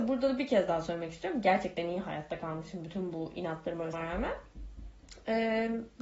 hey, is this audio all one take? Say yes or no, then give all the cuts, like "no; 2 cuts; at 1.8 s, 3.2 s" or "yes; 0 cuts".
no; 1 cut; at 3.9 s